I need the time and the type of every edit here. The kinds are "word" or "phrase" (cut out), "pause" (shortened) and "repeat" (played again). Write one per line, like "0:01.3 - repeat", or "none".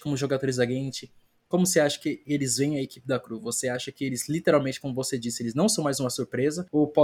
none

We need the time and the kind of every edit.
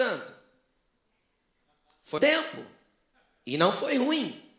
0:02.2 - word

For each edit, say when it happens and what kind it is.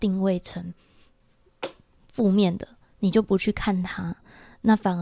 none

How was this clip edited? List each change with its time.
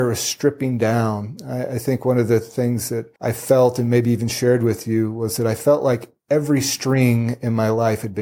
0:03.2 - pause

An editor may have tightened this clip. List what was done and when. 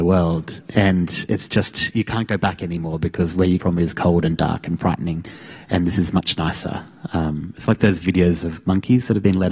0:03.6 - word

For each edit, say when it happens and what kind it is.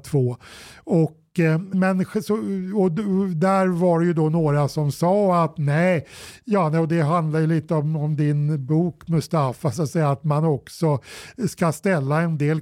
0:01.7 - word

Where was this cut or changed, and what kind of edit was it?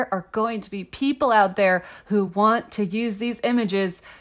none

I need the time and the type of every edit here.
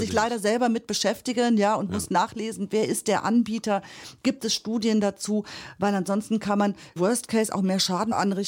none

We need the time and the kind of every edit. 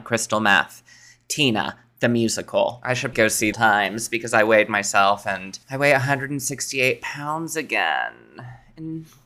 0:03.1 - word
0:03.5 - phrase
0:05.6 - pause

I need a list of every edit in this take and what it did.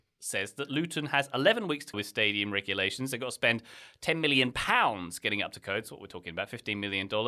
0:01.9 - word

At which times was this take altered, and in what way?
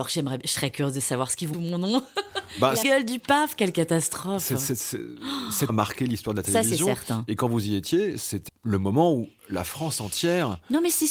0:01.5 - phrase
0:02.8 - phrase
0:05.7 - word
0:08.5 - word

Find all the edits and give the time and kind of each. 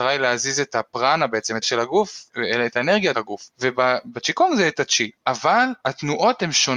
0:01.6 - word
0:03.1 - word

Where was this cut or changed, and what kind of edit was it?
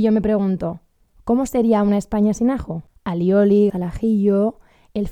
0:03.7 - word

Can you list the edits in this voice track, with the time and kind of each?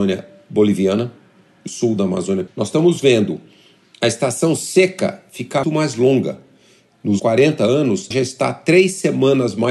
0:01.7 - word
0:02.5 - word
0:05.6 - word
0:07.2 - word
0:08.1 - word

